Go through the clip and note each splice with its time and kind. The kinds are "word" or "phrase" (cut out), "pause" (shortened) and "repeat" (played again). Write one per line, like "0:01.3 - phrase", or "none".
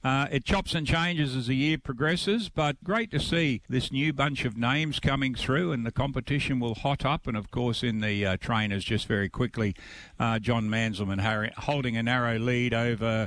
0:02.8 - word
0:03.7 - pause